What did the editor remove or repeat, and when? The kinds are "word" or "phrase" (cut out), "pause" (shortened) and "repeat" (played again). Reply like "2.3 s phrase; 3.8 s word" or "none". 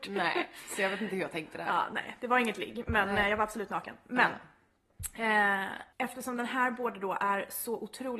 5.9 s pause